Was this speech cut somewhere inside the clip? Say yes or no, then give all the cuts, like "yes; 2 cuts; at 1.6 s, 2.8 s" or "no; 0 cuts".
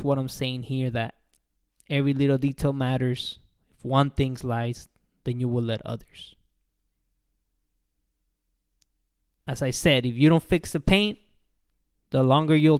no; 0 cuts